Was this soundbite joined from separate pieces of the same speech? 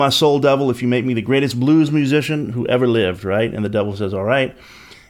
no; 0 cuts

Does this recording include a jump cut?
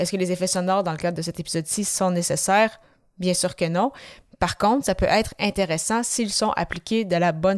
no; 0 cuts

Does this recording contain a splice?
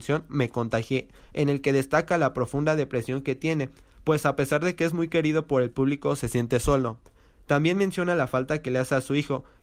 no; 0 cuts

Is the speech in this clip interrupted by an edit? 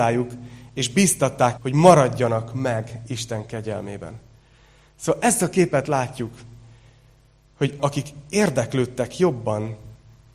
yes; 2 cuts; at 1.6 s, 7.8 s

